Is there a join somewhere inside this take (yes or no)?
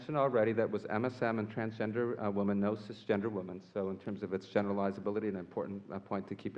no